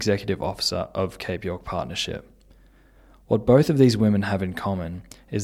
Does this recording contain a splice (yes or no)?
no